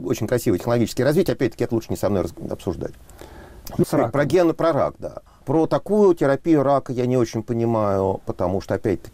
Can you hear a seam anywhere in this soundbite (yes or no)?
yes